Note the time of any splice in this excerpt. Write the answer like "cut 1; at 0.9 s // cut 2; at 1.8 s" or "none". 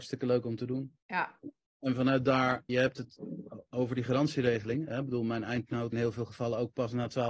cut 1; at 1.0 s // cut 2; at 2.7 s // cut 3; at 5.9 s